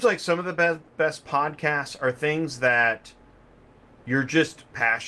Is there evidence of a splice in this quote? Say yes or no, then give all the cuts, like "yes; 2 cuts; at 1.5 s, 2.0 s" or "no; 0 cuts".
no; 0 cuts